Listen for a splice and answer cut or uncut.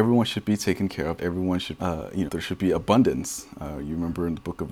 cut